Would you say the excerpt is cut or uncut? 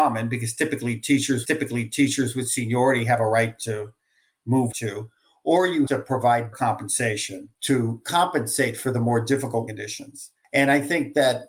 cut